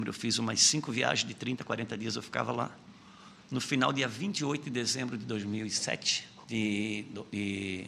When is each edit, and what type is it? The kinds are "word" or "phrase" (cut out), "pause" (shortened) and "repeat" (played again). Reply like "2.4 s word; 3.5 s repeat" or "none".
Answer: 6.4 s pause